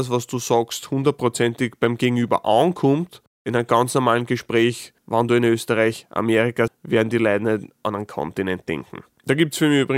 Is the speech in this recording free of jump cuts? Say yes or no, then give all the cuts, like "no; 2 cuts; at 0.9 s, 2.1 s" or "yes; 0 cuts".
no; 2 cuts; at 5.0 s, 6.7 s